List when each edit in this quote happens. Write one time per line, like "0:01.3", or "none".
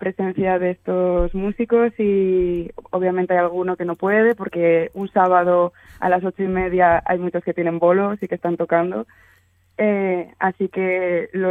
none